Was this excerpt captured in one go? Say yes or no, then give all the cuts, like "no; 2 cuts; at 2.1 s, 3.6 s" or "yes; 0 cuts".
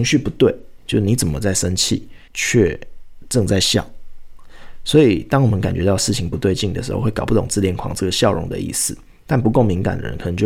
no; 1 cut; at 2.3 s